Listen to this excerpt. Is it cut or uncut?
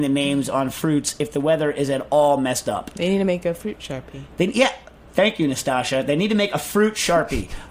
uncut